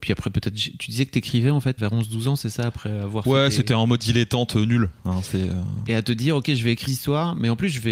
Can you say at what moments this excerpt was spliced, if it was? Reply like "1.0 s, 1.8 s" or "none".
1.8 s, 6.9 s